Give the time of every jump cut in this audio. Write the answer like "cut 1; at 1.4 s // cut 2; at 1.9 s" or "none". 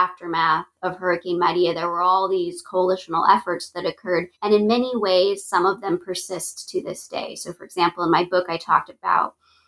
cut 1; at 4.3 s